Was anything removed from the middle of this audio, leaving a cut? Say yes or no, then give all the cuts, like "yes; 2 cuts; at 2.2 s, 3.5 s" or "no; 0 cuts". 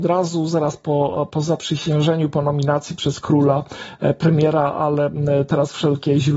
no; 0 cuts